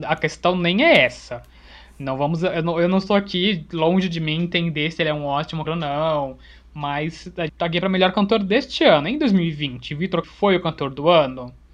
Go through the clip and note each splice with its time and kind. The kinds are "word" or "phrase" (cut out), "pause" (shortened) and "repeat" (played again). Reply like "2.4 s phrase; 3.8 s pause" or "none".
5.6 s word; 7.5 s word; 10.2 s word